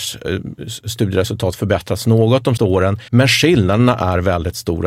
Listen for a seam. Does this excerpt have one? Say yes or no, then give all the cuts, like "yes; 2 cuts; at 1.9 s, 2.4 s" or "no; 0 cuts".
yes; 2 cuts; at 2.6 s, 3.1 s